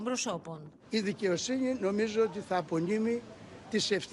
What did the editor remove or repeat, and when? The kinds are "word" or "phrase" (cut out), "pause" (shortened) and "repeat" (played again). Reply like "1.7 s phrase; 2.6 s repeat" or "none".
none